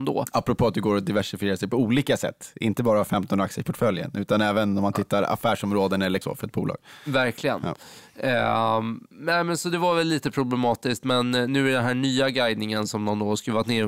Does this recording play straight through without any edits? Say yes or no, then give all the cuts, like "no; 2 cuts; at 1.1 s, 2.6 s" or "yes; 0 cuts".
no; 1 cut; at 6.2 s